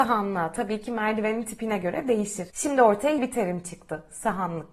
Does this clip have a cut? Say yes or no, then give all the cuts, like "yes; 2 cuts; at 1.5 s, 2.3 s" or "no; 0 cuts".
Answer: yes; 1 cut; at 3.2 s